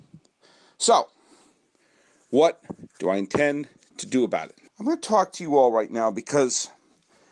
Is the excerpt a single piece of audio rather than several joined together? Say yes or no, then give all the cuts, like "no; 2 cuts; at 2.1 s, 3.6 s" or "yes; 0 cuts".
no; 2 cuts; at 2.9 s, 4.7 s